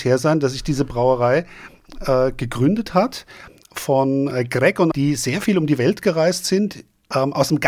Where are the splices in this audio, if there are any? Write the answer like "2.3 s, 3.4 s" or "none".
3.7 s, 4.9 s